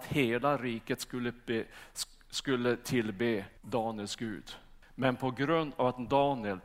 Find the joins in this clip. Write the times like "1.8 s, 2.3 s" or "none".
3.6 s, 4.8 s